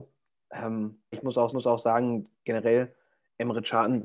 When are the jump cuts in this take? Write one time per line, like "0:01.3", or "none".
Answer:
0:01.1
0:01.5